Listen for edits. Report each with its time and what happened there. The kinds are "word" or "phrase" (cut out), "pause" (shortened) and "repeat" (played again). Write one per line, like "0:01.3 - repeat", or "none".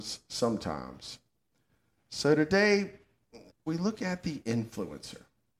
0:03.5 - word